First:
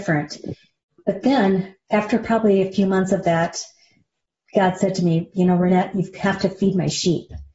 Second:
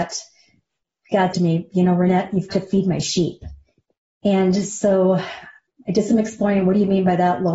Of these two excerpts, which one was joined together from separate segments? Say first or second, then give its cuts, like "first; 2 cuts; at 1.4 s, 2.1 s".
second; 2 cuts; at 1.3 s, 2.5 s